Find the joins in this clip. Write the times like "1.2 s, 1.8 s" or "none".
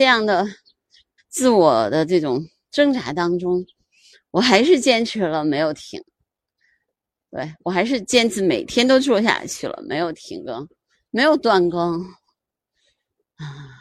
1.2 s